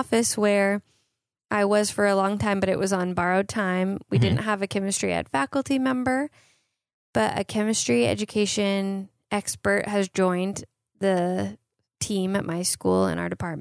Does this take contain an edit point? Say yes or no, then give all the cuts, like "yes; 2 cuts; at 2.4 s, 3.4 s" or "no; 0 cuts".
no; 0 cuts